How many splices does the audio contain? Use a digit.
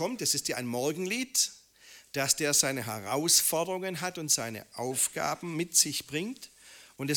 0